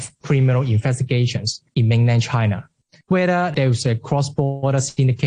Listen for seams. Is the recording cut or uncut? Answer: uncut